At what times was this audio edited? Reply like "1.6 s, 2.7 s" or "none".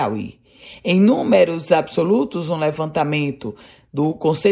none